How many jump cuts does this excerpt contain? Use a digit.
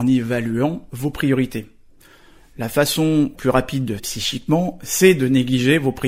2